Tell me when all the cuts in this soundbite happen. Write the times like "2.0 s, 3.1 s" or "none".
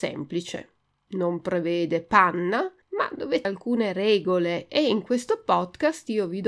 2.8 s, 3.4 s